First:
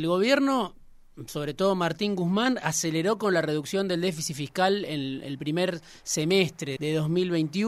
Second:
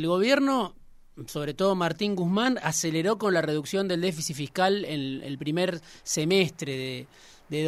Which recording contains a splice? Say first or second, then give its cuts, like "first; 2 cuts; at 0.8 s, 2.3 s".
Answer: first; 1 cut; at 6.8 s